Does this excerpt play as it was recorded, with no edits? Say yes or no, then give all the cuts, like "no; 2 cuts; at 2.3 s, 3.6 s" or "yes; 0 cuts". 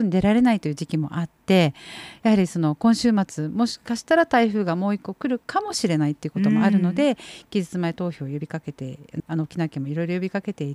no; 1 cut; at 9.2 s